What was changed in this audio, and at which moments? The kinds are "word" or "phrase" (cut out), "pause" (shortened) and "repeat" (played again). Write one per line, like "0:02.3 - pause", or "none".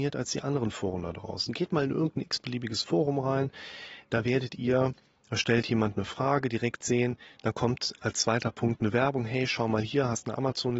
none